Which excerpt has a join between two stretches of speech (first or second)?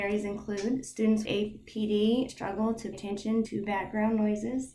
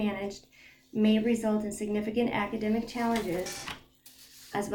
first